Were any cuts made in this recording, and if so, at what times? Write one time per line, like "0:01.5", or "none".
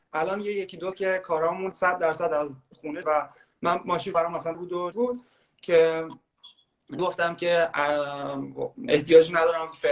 0:00.9
0:01.7
0:03.0
0:04.1
0:04.5
0:04.9
0:07.0